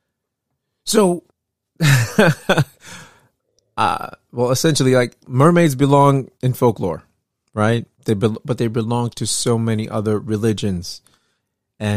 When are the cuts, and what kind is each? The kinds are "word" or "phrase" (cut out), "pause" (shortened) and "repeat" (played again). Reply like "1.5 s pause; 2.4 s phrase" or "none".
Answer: 1.3 s pause; 6.4 s pause; 7.9 s pause